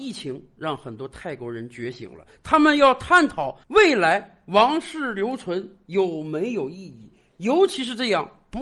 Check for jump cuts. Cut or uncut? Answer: cut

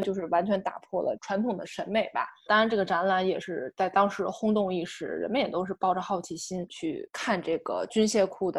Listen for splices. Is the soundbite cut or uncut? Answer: uncut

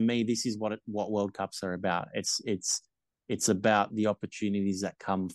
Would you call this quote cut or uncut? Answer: uncut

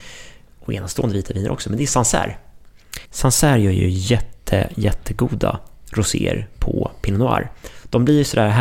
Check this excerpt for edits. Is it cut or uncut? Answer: cut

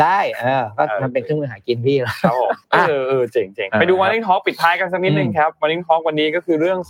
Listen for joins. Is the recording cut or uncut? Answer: cut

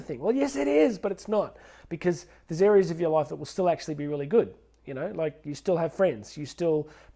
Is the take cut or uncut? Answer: uncut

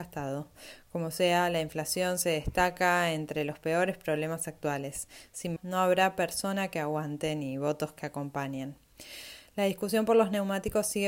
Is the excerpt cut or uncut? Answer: cut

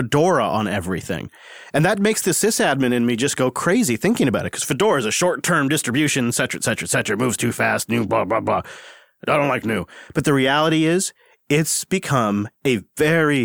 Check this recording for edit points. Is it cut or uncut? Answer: uncut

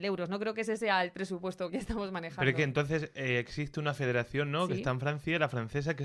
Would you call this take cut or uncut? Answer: cut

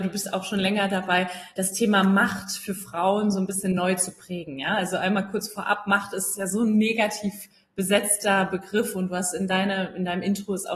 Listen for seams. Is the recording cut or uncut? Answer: uncut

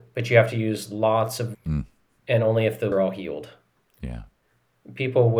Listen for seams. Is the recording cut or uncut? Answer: cut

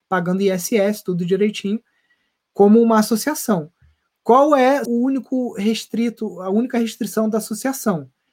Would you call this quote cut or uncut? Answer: cut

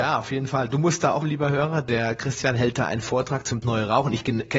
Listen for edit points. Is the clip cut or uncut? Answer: cut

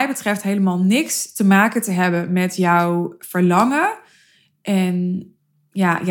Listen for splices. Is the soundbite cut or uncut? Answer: uncut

